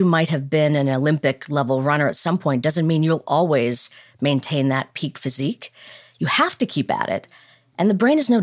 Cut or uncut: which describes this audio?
uncut